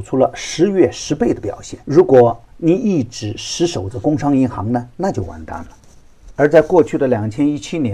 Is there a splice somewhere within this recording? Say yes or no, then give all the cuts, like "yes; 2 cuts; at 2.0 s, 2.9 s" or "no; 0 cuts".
yes; 1 cut; at 1.8 s